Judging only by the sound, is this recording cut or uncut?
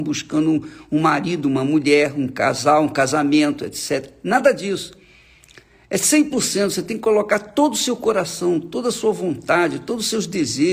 uncut